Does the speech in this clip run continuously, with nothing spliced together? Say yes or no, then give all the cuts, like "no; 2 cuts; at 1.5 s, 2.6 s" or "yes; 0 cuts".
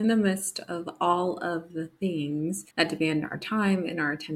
no; 1 cut; at 2.7 s